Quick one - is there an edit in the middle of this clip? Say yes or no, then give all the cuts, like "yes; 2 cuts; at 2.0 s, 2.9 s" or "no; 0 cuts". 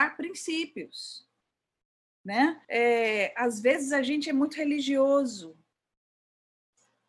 yes; 1 cut; at 2.6 s